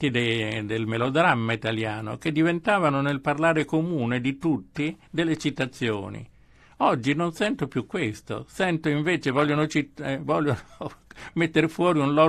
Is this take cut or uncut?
uncut